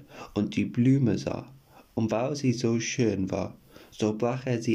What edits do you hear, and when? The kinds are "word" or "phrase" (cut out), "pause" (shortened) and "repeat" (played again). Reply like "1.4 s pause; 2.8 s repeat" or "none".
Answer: none